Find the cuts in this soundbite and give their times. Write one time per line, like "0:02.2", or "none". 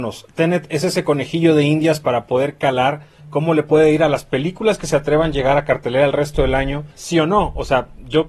0:06.9

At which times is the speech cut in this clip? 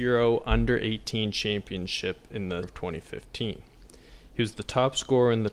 0:02.6

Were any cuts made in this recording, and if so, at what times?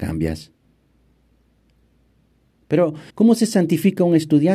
0:03.1

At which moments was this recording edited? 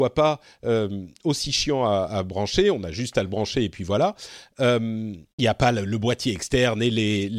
0:05.3

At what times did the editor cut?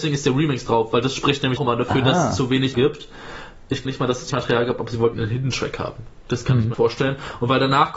0:01.6
0:02.7
0:03.8
0:04.3
0:05.1
0:06.7

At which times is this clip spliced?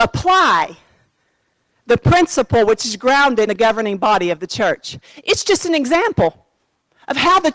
0:03.5

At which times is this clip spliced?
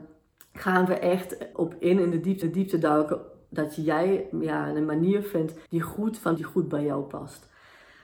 0:01.5
0:02.4
0:05.7
0:06.4

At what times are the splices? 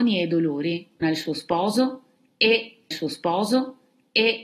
0:01.0
0:02.9

